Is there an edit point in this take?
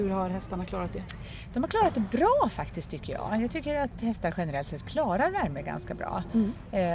no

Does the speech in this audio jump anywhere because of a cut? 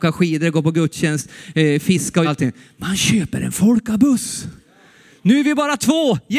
yes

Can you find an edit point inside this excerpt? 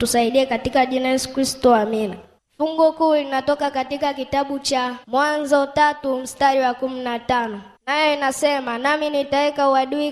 yes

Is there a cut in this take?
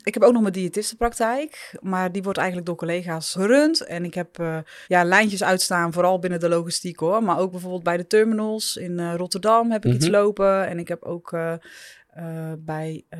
yes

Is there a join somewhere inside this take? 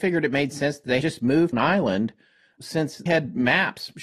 yes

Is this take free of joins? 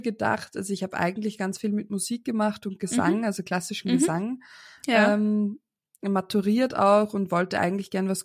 yes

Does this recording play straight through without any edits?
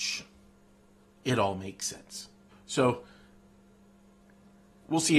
no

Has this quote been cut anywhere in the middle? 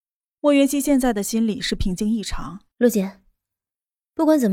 yes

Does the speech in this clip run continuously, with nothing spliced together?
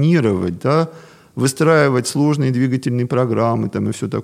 yes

